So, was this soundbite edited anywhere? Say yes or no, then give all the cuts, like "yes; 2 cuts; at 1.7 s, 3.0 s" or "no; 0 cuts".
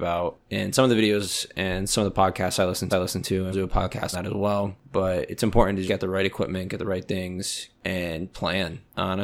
yes; 5 cuts; at 2.9 s, 3.5 s, 4.1 s, 5.9 s, 8.3 s